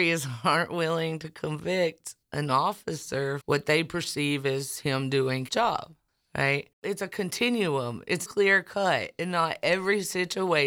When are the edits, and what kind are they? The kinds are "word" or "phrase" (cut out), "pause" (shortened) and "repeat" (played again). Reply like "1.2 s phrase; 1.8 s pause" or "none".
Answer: 2.2 s pause; 3.4 s word; 5.5 s word; 6.7 s pause; 8.3 s word